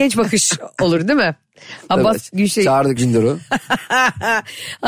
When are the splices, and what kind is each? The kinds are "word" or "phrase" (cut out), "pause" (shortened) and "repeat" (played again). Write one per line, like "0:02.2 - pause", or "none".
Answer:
0:03.0 - word